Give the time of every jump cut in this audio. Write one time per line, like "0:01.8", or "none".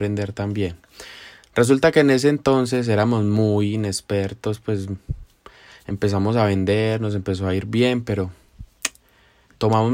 none